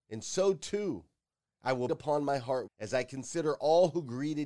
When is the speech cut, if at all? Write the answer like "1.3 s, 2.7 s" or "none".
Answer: 1.9 s, 2.7 s